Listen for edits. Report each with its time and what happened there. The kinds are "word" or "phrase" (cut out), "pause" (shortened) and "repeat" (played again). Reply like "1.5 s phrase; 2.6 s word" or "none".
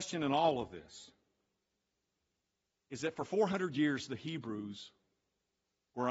none